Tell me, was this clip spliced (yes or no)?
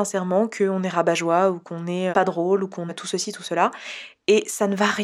yes